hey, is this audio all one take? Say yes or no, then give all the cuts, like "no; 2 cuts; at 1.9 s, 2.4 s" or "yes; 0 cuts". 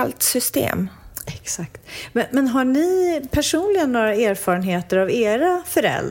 yes; 0 cuts